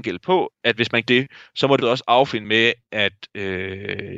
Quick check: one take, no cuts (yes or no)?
no